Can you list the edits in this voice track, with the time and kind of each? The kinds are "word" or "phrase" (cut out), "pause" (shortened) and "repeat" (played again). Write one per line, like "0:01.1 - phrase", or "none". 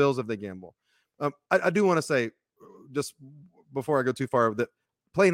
none